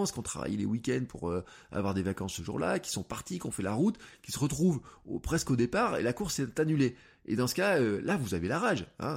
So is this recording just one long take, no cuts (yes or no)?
yes